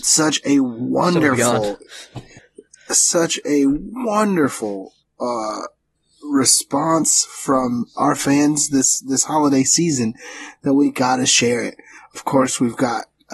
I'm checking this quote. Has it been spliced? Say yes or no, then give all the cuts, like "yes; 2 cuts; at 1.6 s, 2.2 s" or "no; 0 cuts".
no; 0 cuts